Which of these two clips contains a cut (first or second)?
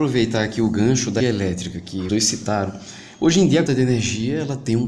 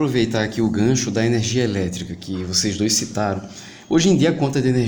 first